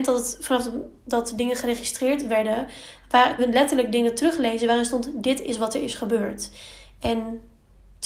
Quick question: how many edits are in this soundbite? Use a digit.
1